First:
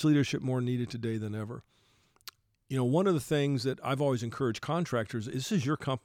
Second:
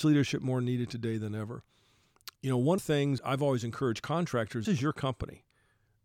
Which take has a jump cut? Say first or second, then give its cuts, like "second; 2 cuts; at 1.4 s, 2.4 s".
second; 4 cuts; at 2.3 s, 2.8 s, 3.2 s, 4.6 s